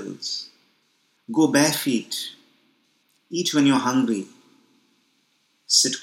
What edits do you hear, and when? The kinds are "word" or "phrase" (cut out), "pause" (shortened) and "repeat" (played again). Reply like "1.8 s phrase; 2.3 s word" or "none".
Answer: none